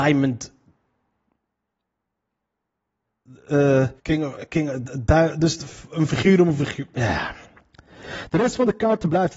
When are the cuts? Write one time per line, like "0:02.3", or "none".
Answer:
0:04.0